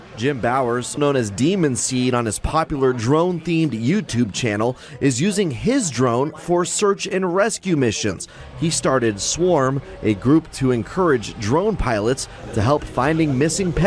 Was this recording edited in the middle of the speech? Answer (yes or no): yes